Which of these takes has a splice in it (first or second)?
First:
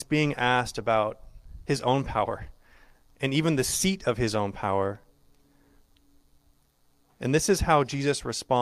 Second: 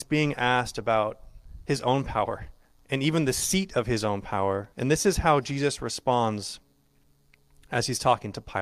second